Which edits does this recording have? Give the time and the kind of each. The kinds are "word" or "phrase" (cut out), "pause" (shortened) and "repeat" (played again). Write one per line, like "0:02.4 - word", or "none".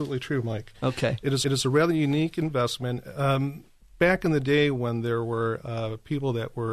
0:01.4 - repeat